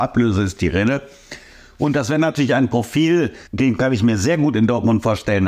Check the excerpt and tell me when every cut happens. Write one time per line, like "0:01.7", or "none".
0:03.5

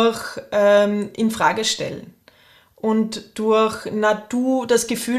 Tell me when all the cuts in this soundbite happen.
none

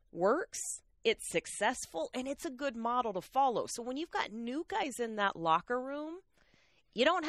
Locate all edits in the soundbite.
none

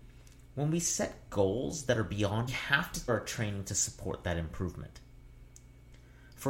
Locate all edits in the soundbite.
0:02.5
0:03.1

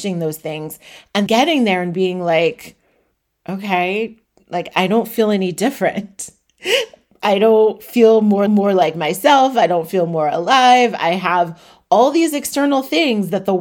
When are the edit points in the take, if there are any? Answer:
0:01.3
0:08.5

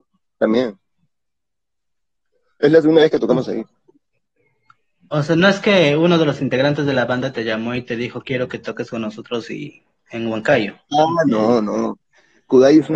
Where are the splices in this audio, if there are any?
none

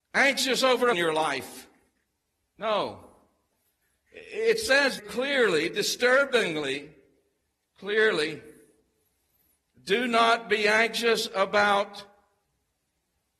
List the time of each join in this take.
0:00.9
0:05.0

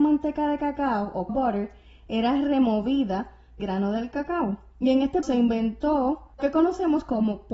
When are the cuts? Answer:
0:01.3
0:03.6
0:05.2
0:06.4

